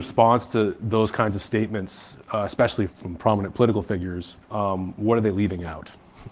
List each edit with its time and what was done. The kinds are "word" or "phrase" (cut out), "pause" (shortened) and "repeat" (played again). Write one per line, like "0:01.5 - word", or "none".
0:02.9 - word
0:04.4 - pause